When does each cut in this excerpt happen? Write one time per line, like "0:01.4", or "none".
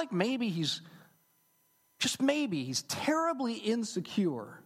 none